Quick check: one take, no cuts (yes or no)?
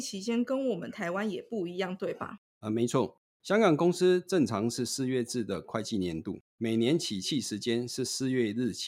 no